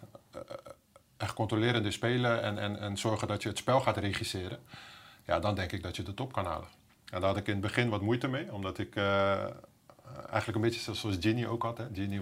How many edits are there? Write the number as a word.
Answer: zero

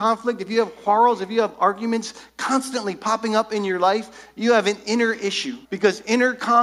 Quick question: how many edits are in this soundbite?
one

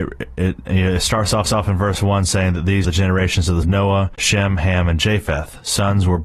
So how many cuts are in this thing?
four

